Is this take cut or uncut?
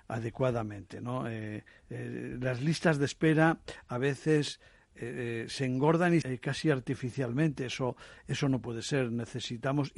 cut